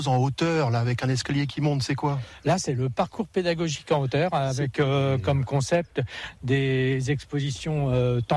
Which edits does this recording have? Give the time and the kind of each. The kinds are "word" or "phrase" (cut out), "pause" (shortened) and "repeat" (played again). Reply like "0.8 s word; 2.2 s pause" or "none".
none